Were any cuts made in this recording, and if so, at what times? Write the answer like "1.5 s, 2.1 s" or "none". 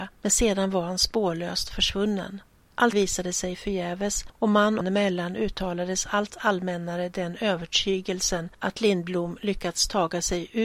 2.9 s, 4.8 s

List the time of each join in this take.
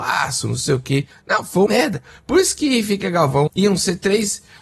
1.7 s, 3.5 s

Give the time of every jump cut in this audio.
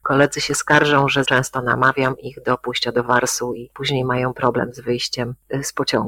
1.2 s

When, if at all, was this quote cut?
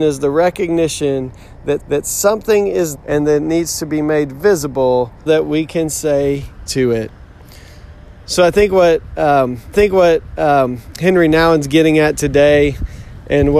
1.8 s, 2.9 s, 5.3 s, 6.7 s, 9.7 s

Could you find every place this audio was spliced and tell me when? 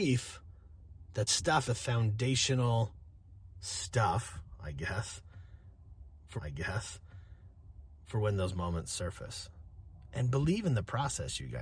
1.3 s, 1.6 s, 6.4 s

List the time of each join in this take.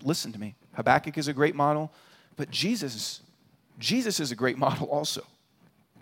none

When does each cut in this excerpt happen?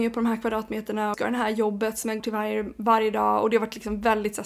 1.1 s, 2.2 s

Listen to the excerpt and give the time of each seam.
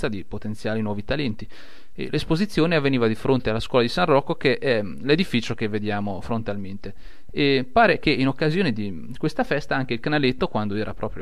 none

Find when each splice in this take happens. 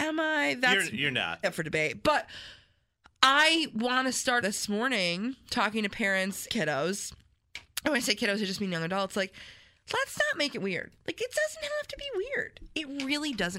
1.4 s, 4.4 s, 6.5 s

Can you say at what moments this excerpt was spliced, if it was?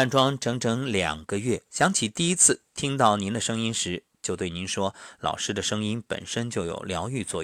1.7 s, 4.1 s

